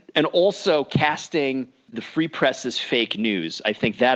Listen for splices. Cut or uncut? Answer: uncut